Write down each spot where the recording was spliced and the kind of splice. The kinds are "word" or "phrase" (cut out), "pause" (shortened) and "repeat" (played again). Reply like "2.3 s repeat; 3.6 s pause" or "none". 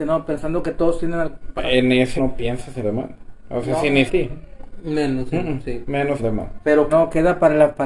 1.6 s word; 2.2 s word; 2.8 s word; 4.1 s phrase; 6.2 s phrase; 6.9 s word